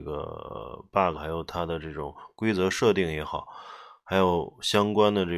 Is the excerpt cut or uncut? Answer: cut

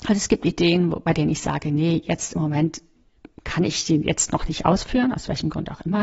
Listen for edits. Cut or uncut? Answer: uncut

